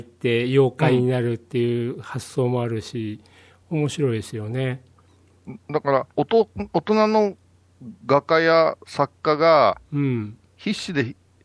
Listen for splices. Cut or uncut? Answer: cut